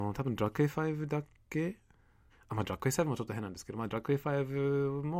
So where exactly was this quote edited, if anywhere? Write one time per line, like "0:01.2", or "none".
0:02.3